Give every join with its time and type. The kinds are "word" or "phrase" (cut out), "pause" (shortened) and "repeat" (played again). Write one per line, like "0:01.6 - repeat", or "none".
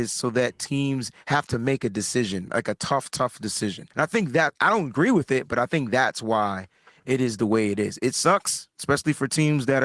0:03.9 - pause